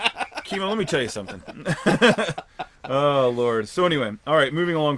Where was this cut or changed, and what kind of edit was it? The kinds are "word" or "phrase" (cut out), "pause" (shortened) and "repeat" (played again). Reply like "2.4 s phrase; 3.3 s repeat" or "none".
none